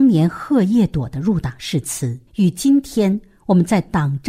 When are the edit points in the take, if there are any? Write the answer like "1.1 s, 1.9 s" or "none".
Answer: 2.3 s

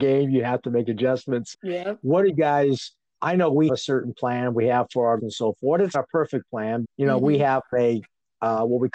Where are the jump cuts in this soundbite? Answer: 1.5 s, 2.3 s, 3.2 s, 3.7 s, 5.2 s, 5.9 s, 6.8 s, 7.7 s

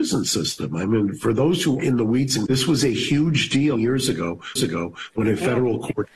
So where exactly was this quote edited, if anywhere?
1.8 s, 2.5 s, 3.8 s, 4.6 s

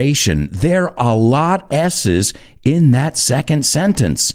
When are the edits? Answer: 1.0 s, 1.7 s

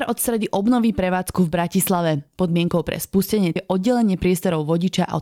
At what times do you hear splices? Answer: 3.6 s

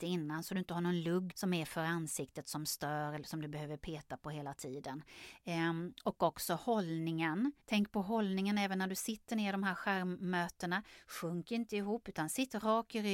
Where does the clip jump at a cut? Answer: 1.3 s, 7.6 s

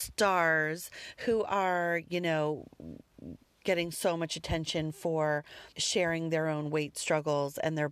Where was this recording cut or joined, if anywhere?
5.7 s

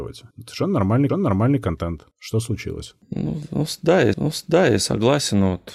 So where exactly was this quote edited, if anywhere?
1.1 s, 4.1 s

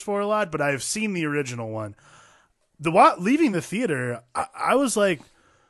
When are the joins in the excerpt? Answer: none

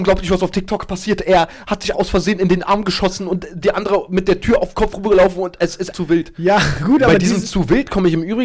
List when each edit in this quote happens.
1.9 s, 5.9 s

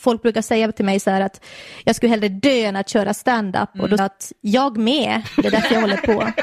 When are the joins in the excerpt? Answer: 4.0 s

